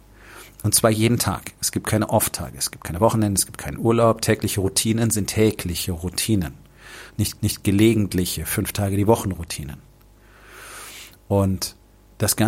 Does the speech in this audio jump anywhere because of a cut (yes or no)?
yes